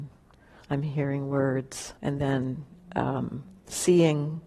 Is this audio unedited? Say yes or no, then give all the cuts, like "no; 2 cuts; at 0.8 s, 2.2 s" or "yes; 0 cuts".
no; 1 cut; at 2.0 s